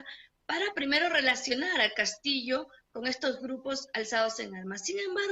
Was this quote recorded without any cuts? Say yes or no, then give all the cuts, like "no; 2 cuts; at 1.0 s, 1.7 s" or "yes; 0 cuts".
yes; 0 cuts